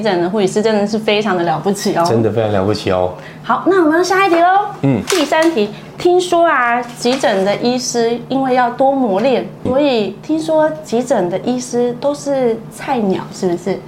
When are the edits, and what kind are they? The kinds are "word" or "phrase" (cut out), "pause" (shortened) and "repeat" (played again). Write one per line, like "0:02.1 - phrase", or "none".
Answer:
0:09.7 - word